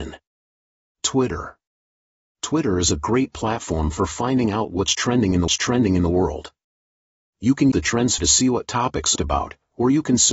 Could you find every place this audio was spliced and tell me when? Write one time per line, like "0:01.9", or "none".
0:05.5
0:07.7
0:08.2
0:09.2